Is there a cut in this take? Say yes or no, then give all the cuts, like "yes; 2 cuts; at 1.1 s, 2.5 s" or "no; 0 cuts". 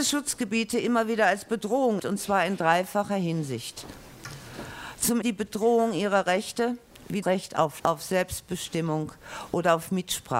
yes; 4 cuts; at 2.0 s, 5.2 s, 7.2 s, 7.8 s